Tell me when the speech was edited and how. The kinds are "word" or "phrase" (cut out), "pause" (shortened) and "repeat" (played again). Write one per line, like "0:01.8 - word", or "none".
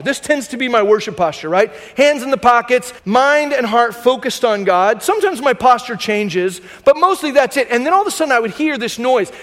0:03.0 - pause